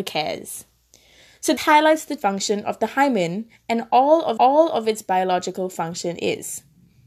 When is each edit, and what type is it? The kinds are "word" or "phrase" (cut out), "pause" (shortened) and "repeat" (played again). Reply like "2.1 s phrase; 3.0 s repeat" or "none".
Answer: 1.6 s word; 2.2 s word; 4.4 s repeat